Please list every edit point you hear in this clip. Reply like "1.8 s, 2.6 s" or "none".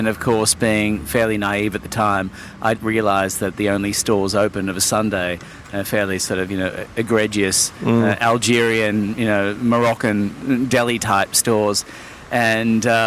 2.7 s